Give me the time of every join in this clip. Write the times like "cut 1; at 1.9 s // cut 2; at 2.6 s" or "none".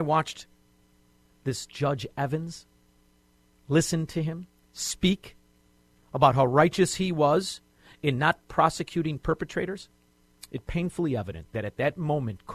cut 1; at 10.6 s